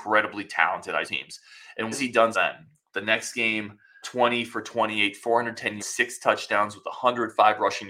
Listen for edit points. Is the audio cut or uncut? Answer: cut